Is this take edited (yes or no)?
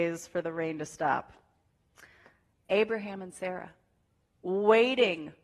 no